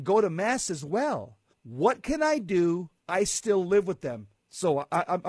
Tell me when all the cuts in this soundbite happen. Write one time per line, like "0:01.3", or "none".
0:01.5
0:04.4